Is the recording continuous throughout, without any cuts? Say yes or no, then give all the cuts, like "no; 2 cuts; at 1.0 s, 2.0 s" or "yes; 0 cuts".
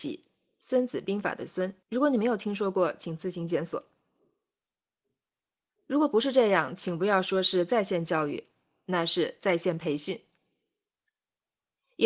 no; 1 cut; at 1.8 s